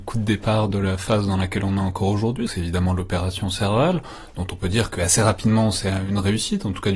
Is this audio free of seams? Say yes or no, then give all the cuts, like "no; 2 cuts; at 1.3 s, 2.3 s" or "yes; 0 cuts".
no; 1 cut; at 2.5 s